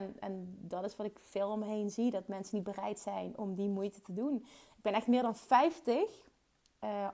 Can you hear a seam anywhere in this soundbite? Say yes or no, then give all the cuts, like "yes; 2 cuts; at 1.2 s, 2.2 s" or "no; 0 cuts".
no; 0 cuts